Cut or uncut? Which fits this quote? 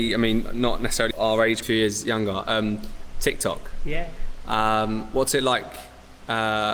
cut